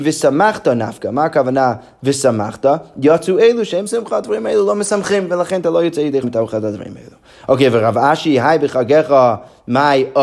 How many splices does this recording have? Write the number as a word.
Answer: two